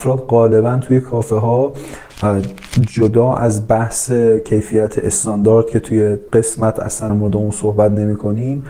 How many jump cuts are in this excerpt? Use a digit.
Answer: 2